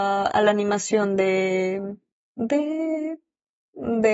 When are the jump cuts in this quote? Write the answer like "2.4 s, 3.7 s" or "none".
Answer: none